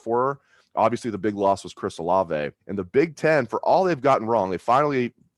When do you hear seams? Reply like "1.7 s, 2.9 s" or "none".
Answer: 2.6 s